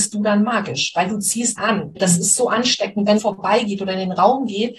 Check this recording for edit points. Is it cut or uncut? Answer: cut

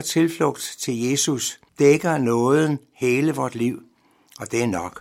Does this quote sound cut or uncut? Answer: cut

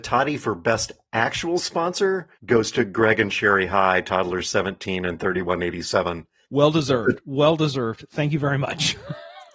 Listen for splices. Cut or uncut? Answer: cut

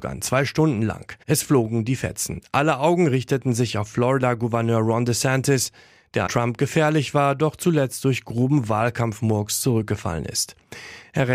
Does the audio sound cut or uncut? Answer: cut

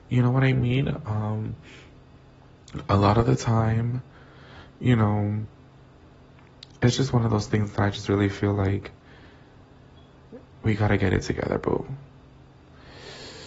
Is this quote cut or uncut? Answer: uncut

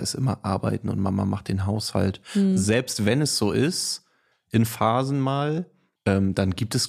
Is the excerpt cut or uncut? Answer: uncut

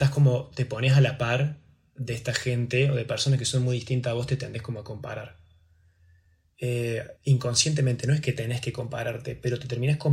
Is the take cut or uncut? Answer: cut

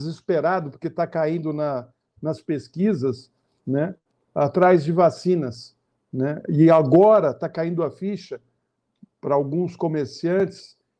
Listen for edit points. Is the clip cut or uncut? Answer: uncut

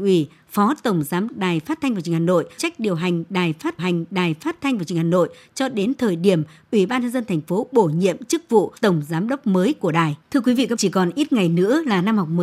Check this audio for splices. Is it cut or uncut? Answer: cut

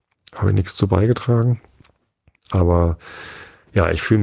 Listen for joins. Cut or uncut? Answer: uncut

